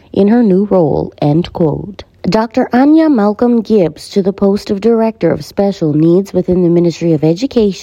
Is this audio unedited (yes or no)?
yes